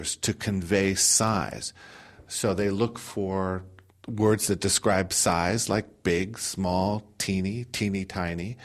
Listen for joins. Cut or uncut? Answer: uncut